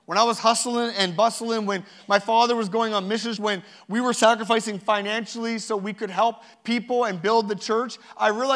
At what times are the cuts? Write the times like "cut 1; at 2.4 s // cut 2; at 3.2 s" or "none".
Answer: cut 1; at 3.4 s